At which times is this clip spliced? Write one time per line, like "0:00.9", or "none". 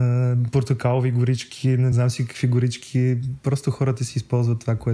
none